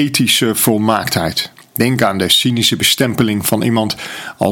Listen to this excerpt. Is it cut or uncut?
uncut